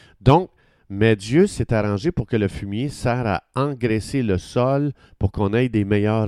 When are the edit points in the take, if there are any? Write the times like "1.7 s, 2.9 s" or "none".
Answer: none